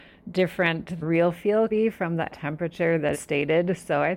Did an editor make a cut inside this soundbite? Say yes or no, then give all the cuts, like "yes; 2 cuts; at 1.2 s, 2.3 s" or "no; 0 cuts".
yes; 4 cuts; at 1.0 s, 1.7 s, 2.3 s, 3.1 s